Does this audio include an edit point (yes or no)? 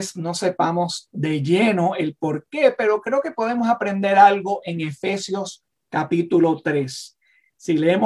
no